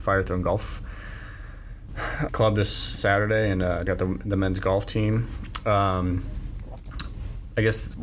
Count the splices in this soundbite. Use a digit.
3